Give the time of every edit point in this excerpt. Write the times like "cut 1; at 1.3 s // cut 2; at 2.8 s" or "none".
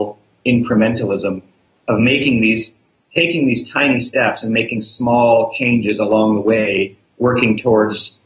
none